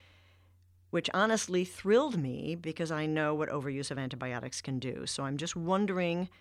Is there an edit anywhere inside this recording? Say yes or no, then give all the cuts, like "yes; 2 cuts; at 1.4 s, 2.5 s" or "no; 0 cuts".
no; 0 cuts